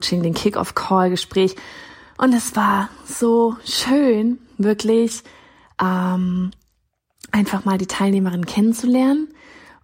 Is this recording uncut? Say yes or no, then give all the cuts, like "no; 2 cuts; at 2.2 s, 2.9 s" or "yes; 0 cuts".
yes; 0 cuts